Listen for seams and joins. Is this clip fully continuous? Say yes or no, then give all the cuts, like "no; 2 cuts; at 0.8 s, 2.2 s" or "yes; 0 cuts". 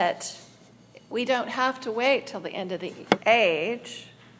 yes; 0 cuts